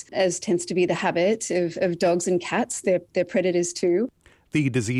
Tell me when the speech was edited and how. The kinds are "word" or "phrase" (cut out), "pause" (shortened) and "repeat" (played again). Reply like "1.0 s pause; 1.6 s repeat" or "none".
none